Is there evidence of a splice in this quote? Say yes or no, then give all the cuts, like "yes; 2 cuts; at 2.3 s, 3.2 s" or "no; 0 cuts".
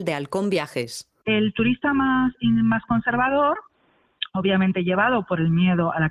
no; 0 cuts